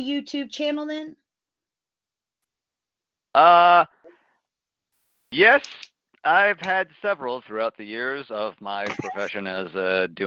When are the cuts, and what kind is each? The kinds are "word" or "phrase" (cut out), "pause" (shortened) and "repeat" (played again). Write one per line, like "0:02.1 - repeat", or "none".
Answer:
none